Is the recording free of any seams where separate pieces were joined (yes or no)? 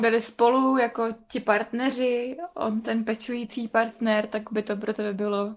yes